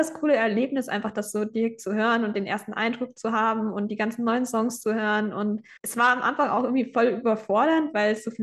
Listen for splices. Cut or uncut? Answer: cut